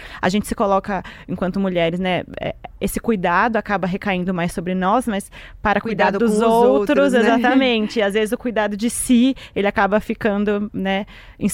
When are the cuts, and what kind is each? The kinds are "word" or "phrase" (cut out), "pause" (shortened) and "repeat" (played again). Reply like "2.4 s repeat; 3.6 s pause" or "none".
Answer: none